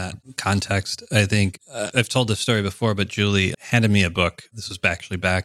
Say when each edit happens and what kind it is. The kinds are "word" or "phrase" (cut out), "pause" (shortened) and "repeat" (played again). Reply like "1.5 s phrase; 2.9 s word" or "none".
1.9 s word; 3.5 s word